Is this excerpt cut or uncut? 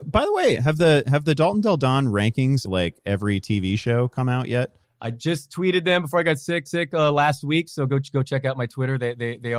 cut